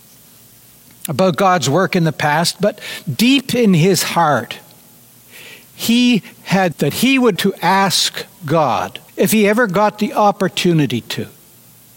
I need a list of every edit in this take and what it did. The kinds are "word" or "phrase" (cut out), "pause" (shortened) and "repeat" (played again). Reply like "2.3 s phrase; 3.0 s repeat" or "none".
6.7 s phrase; 7.4 s word; 9.1 s pause

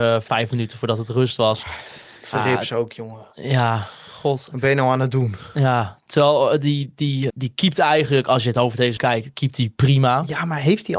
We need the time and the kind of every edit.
7.3 s word; 9.0 s word

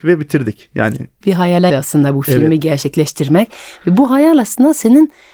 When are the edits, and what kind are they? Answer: 1.2 s word; 1.7 s word

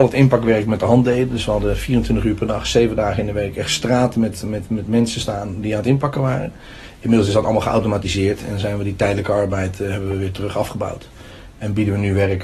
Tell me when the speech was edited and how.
none

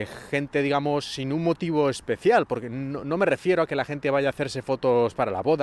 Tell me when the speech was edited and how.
none

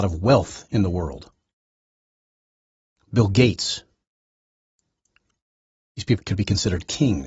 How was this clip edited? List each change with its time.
6.2 s word

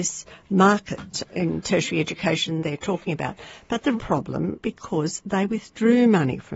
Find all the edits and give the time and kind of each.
1.2 s word; 2.6 s word; 4.0 s word; 4.6 s word

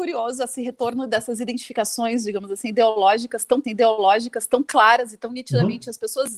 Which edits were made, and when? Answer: 3.6 s repeat

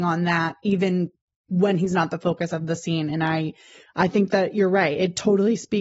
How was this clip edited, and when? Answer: none

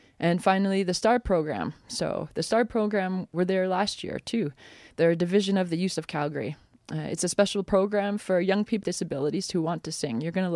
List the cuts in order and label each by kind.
3.3 s word; 6.0 s word; 8.8 s word

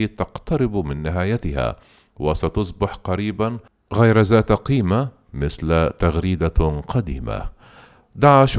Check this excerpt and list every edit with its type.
none

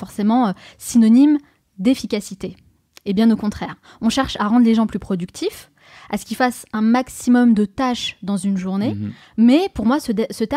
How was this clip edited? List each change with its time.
none

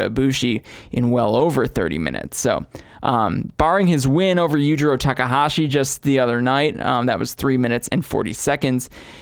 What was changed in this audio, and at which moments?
none

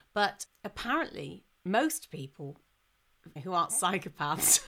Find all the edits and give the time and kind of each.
3.4 s word

